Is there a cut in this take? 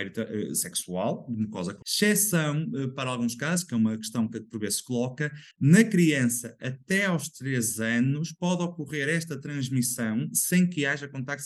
yes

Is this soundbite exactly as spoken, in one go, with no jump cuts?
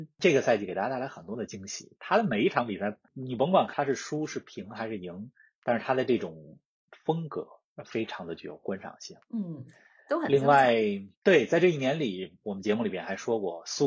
yes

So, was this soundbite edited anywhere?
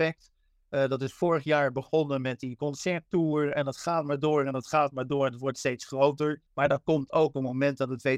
yes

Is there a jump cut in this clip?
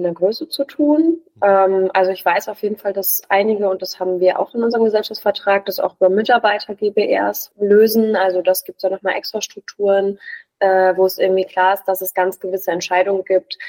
no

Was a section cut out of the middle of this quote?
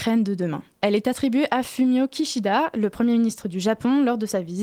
no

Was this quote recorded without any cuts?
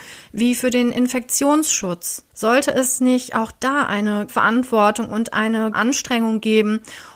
no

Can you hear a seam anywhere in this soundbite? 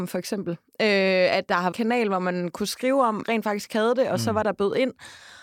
yes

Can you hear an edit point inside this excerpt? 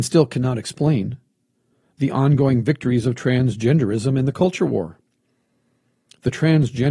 no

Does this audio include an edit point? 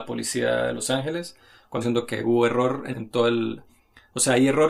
yes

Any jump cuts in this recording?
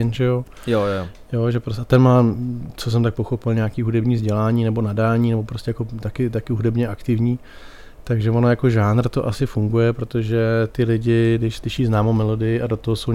no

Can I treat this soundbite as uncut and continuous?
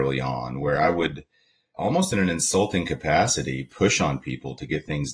yes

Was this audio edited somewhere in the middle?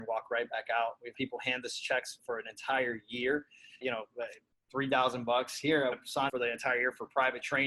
yes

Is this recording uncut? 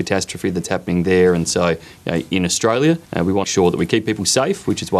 no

